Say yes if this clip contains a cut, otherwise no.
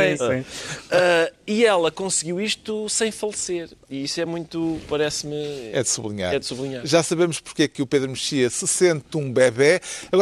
no